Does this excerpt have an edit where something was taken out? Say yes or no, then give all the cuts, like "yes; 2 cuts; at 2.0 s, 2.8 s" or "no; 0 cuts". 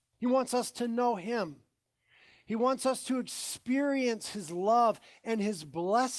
no; 0 cuts